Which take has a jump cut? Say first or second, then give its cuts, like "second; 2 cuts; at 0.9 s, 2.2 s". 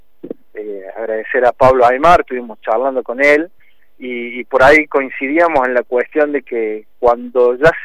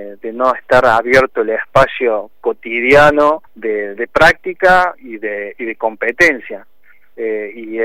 second; 1 cut; at 3.5 s